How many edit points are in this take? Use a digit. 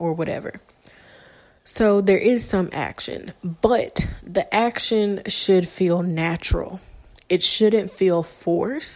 0